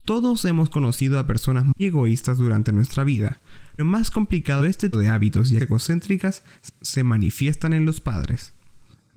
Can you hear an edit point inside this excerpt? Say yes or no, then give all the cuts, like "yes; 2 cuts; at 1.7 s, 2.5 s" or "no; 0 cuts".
yes; 5 cuts; at 1.8 s, 3.8 s, 4.6 s, 4.9 s, 5.6 s